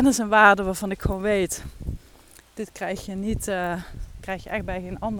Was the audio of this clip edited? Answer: no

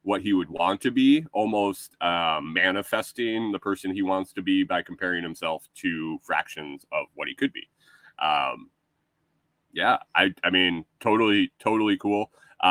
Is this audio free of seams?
yes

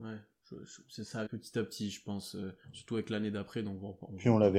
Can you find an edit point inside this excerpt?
yes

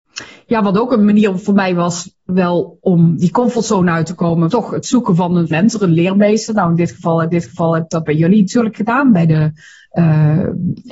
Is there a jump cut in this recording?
yes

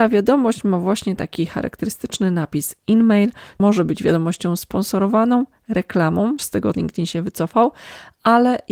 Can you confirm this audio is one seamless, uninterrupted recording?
no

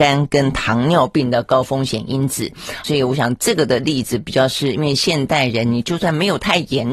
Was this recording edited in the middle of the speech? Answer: yes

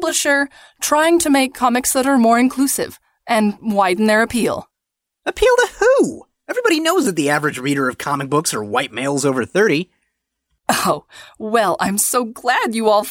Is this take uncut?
yes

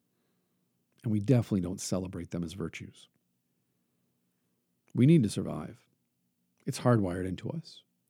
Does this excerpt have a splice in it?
no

